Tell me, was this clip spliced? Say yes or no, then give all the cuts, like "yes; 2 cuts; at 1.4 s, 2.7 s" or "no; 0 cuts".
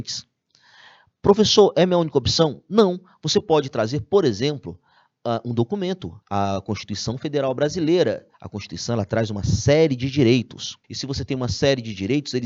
yes; 3 cuts; at 6.2 s, 8.3 s, 10.8 s